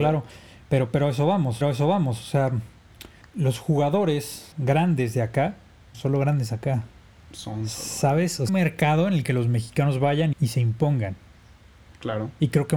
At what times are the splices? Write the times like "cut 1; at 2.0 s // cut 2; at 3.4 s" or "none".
cut 1; at 1.6 s // cut 2; at 3.2 s // cut 3; at 4.5 s // cut 4; at 5.9 s // cut 5; at 8.5 s // cut 6; at 10.3 s